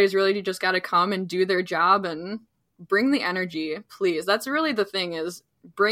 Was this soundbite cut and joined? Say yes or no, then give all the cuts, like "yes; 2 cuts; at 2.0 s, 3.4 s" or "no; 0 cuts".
no; 0 cuts